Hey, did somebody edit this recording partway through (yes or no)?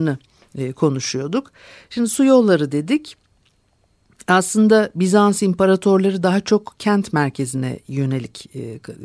no